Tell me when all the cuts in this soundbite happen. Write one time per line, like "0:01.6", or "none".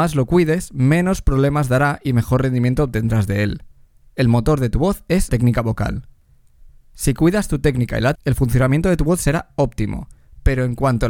0:05.3
0:08.2